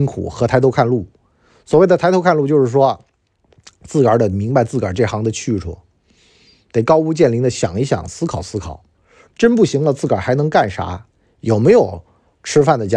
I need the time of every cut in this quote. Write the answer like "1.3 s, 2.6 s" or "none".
none

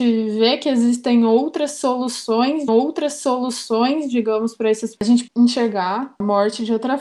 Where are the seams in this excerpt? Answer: 2.7 s, 5.0 s, 5.3 s

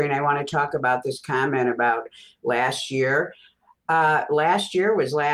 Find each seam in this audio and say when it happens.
none

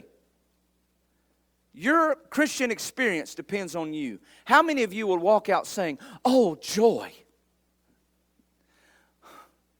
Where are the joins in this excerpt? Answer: none

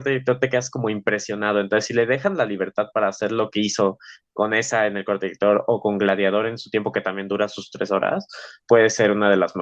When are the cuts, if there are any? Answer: 8.6 s

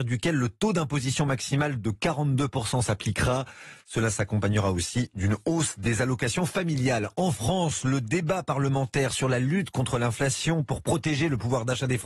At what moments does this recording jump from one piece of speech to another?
none

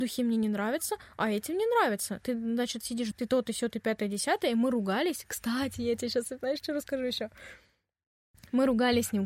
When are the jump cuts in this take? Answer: 3.1 s

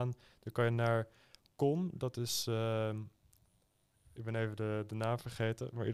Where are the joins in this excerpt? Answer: none

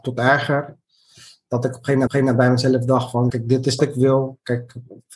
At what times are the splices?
2.1 s, 3.3 s, 3.8 s

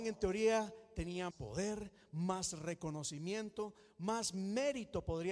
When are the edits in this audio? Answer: 1.3 s

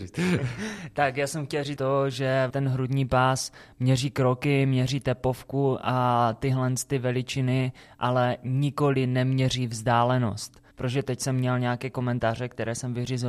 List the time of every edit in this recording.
1.8 s, 2.5 s, 10.7 s

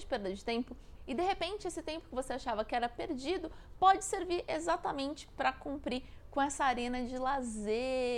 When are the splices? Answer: none

